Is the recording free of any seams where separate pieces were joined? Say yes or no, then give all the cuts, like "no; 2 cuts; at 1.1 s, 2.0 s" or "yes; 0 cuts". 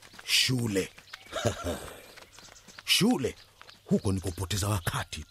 yes; 0 cuts